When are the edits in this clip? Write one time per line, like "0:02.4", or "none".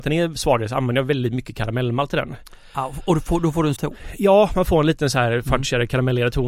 0:03.8